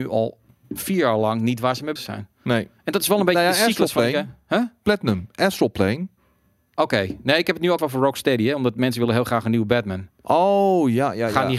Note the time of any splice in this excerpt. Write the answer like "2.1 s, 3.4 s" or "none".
2.0 s, 7.8 s